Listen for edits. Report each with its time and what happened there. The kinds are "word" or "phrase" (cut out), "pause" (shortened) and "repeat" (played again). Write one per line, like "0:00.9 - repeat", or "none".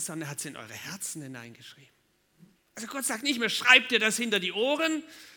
0:02.6 - pause